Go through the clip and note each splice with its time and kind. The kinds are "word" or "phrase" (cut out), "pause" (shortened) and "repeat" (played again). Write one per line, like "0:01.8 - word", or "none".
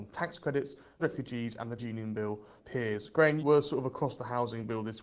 0:01.0 - word
0:01.8 - word
0:02.6 - word
0:03.4 - word